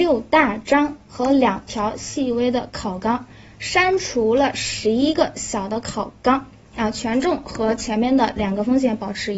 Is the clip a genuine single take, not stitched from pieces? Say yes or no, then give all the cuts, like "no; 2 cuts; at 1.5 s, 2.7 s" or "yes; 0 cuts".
yes; 0 cuts